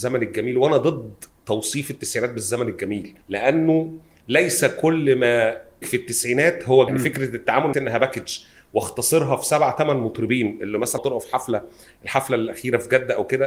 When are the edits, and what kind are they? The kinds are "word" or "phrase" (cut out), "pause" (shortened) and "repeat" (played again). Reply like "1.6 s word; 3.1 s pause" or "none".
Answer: 3.2 s pause; 5.8 s word; 6.9 s phrase; 7.7 s phrase; 11.0 s word